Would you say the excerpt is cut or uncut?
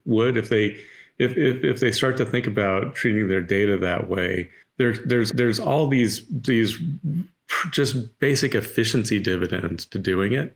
cut